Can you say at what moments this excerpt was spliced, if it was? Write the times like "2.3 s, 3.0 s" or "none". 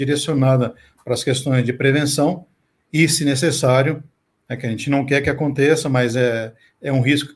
none